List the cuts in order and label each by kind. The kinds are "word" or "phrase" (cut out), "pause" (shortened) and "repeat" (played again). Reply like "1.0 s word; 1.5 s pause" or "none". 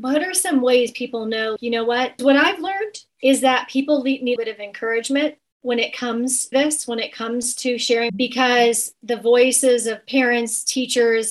1.6 s word; 2.2 s word; 3.1 s pause; 4.4 s phrase; 6.5 s word; 8.1 s phrase